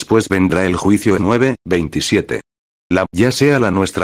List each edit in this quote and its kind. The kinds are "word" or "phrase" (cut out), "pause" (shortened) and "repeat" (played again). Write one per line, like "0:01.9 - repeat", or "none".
0:01.2 - word
0:03.0 - word